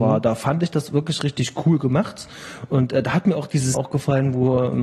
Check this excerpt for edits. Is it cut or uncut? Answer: cut